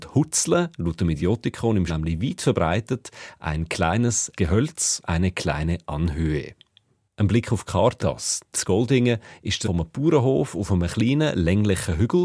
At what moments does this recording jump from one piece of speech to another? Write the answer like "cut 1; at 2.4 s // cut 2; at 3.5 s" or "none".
cut 1; at 1.9 s // cut 2; at 4.4 s // cut 3; at 5.0 s // cut 4; at 8.0 s // cut 5; at 8.5 s // cut 6; at 9.6 s